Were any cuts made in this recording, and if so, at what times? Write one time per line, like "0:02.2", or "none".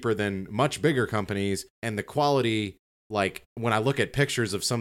0:01.7
0:03.5